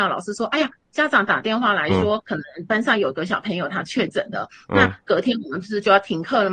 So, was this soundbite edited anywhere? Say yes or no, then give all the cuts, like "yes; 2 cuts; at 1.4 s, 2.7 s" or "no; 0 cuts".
yes; 1 cut; at 2.2 s